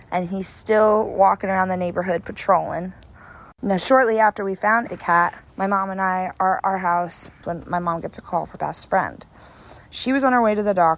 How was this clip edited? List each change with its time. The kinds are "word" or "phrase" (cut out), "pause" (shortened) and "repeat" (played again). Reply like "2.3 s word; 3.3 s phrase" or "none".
3.5 s pause; 4.9 s word; 5.5 s pause; 6.6 s word; 8.6 s word